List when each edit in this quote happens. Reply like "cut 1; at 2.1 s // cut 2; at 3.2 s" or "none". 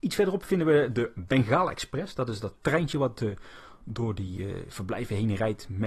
cut 1; at 2.6 s